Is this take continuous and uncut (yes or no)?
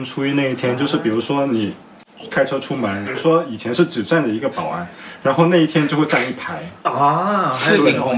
no